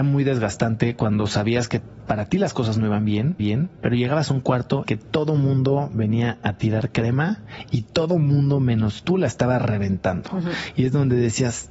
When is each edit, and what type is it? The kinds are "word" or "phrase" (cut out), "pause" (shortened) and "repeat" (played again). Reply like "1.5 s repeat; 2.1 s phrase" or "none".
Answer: 3.4 s repeat; 4.8 s phrase